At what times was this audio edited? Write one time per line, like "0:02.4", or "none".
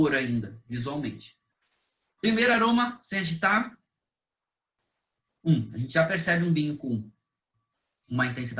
none